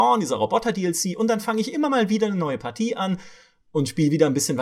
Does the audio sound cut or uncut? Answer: uncut